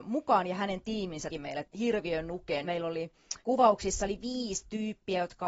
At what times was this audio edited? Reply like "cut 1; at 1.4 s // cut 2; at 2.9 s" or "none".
cut 1; at 1.3 s // cut 2; at 1.6 s // cut 3; at 2.6 s // cut 4; at 3.4 s